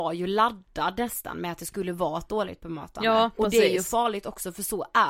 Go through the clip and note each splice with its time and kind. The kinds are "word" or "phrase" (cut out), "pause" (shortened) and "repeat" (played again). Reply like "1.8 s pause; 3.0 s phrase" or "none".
none